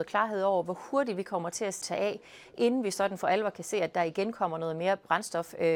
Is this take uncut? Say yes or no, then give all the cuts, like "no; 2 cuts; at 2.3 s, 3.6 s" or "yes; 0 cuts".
no; 1 cut; at 1.8 s